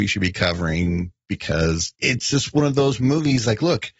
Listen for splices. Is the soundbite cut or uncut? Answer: cut